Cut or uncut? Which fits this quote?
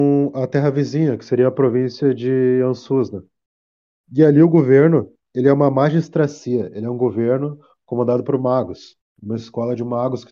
uncut